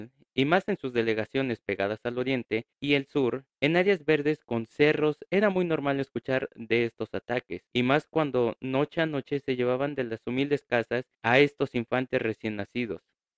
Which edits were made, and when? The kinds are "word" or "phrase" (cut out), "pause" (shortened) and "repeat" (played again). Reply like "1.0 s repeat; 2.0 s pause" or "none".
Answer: 2.7 s pause; 3.5 s pause; 7.7 s pause; 11.1 s pause